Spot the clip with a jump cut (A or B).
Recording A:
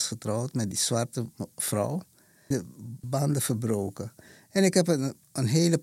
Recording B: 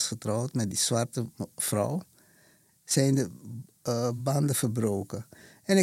A